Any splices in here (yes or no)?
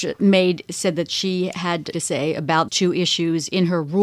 yes